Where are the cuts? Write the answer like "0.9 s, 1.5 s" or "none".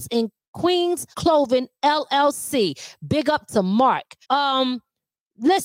1.1 s, 4.2 s